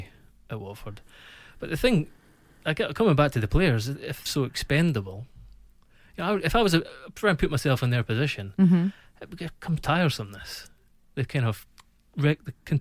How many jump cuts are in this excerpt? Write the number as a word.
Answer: two